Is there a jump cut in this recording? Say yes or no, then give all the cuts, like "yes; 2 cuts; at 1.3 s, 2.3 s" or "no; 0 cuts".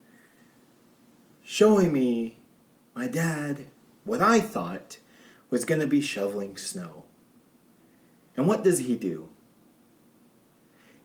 no; 0 cuts